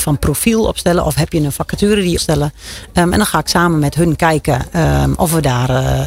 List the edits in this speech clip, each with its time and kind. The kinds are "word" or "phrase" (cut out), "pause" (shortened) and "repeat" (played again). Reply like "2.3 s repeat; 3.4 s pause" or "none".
2.2 s phrase